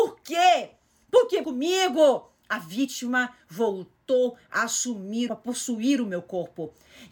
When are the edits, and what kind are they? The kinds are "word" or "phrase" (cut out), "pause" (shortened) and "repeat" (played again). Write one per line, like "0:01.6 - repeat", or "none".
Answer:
0:01.4 - phrase
0:05.3 - phrase